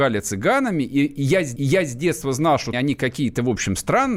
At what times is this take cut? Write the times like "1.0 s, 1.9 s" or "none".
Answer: 1.6 s, 2.7 s